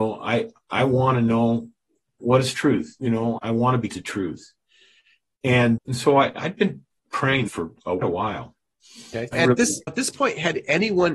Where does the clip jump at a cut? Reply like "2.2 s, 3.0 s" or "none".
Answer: 2.2 s, 3.0 s, 3.4 s, 3.9 s, 5.8 s, 7.5 s, 8.0 s, 9.3 s, 9.9 s